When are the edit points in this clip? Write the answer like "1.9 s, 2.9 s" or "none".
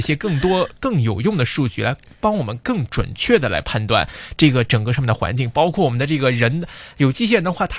none